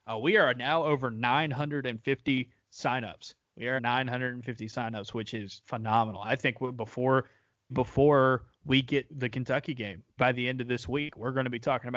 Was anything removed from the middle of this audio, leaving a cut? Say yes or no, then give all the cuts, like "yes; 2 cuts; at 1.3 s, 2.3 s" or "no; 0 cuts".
yes; 5 cuts; at 3.8 s, 5.6 s, 7.7 s, 9.1 s, 10.2 s